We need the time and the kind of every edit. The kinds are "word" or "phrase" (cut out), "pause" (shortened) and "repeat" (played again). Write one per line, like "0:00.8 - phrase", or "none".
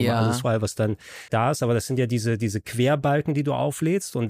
0:01.3 - word